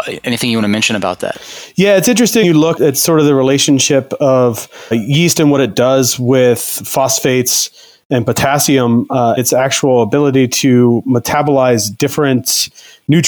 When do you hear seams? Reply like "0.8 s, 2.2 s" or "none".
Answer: 2.4 s, 2.8 s, 4.9 s, 9.4 s